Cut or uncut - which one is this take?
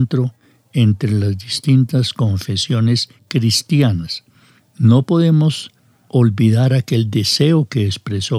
uncut